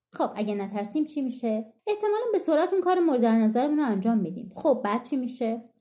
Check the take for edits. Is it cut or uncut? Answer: cut